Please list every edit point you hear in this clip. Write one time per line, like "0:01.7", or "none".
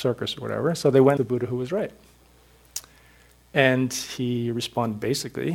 0:01.2